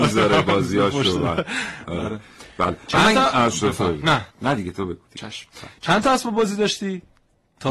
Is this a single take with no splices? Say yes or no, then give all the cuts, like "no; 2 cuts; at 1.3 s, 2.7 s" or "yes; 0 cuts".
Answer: no; 1 cut; at 4.3 s